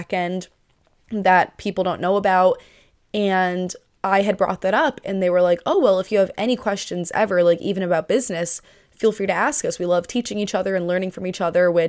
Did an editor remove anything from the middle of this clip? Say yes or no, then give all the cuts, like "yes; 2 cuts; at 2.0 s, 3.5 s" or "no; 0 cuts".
no; 0 cuts